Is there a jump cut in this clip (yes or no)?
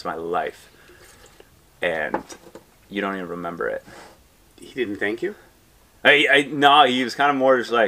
no